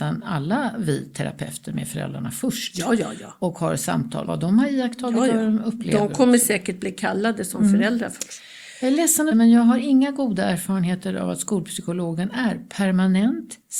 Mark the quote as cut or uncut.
cut